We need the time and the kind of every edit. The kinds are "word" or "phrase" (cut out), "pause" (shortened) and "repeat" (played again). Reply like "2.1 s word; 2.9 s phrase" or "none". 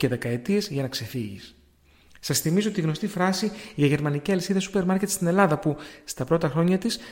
none